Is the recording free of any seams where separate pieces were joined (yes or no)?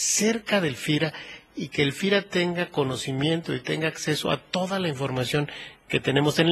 yes